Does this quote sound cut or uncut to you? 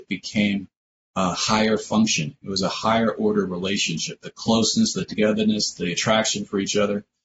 uncut